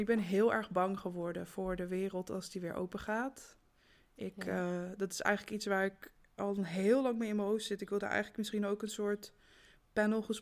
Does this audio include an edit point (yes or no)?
no